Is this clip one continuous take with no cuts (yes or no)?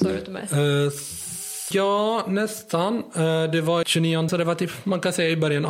no